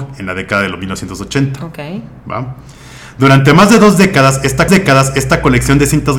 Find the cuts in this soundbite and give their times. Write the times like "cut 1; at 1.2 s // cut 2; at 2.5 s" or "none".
cut 1; at 4.7 s